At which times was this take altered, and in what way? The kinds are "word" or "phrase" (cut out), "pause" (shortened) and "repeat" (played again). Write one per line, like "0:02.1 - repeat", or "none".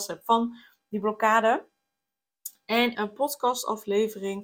0:02.9 - word

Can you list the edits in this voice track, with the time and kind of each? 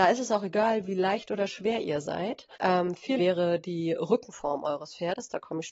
0:02.5 - pause
0:03.2 - word

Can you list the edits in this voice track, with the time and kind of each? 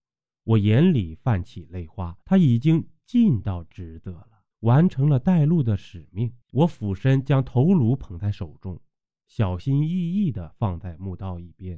0:02.2 - pause
0:04.5 - pause
0:06.4 - pause

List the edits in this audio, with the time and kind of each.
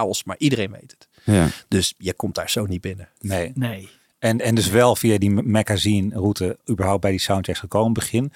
none

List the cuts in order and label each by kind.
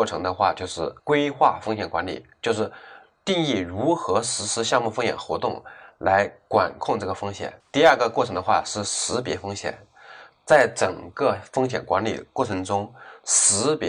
0:01.0 - pause
0:07.6 - pause

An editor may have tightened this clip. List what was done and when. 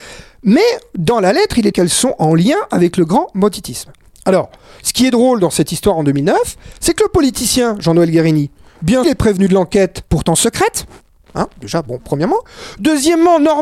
0:01.7 - phrase
0:09.0 - phrase
0:10.1 - pause

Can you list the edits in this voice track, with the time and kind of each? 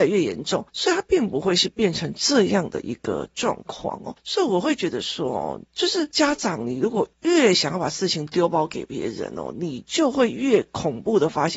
0:07.1 - pause

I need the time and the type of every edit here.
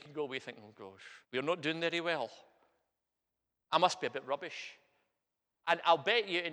0:01.2 - pause

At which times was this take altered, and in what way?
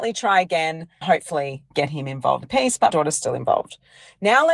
0:01.0 - word
0:01.7 - word
0:02.4 - phrase
0:02.9 - word

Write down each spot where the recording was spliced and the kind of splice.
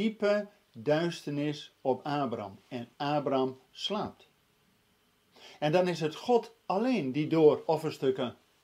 0:03.6 - pause
0:06.6 - pause
0:07.7 - word

